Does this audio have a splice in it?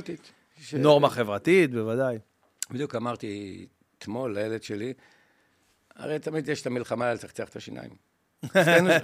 no; 0 cuts

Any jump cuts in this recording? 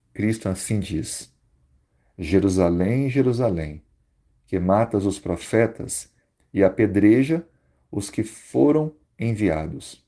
no; 0 cuts

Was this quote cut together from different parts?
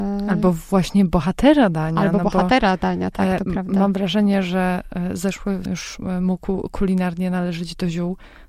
yes; 1 cut; at 5.7 s

